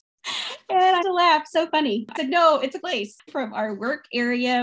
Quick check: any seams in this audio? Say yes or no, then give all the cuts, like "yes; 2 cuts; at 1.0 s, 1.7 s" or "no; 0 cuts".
yes; 4 cuts; at 1.0 s, 2.2 s, 2.8 s, 3.3 s